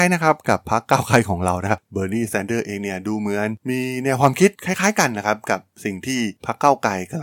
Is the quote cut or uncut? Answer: cut